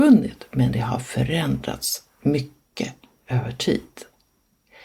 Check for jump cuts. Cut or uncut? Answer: uncut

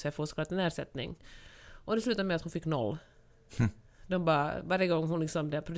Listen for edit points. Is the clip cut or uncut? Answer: uncut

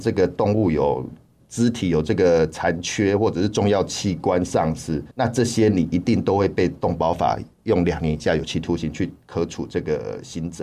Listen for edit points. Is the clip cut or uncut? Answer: cut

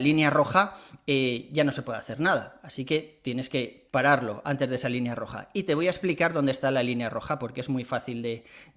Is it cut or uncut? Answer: cut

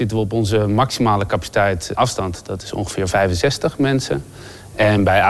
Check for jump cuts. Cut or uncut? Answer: cut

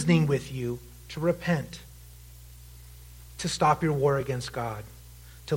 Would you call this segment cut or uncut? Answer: uncut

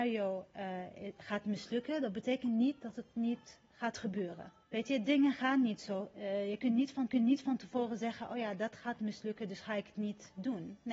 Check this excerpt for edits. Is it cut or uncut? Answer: cut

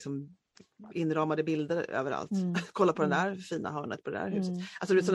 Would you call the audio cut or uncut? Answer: uncut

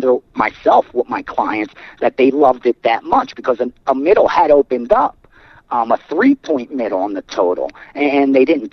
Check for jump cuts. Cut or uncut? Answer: uncut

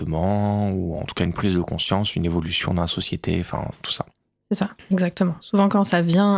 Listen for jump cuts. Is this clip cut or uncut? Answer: uncut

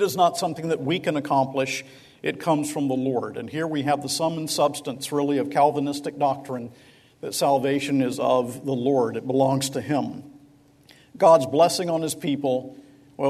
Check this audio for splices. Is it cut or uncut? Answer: uncut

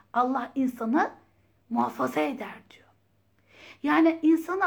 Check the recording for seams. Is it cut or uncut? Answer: uncut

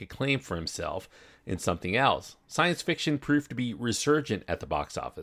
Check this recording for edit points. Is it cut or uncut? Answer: uncut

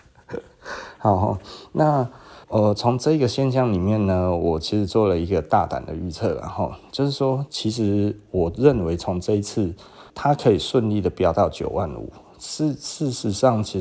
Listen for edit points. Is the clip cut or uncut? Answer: cut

